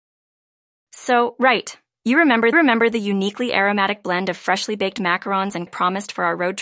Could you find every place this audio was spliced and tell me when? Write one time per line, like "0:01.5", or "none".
0:01.9
0:02.5
0:05.7